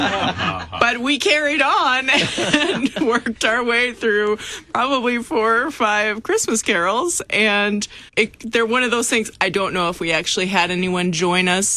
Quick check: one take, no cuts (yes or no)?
no